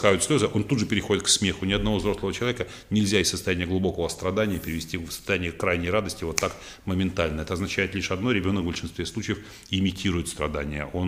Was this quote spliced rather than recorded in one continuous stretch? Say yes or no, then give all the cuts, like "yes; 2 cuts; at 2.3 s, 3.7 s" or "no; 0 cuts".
no; 0 cuts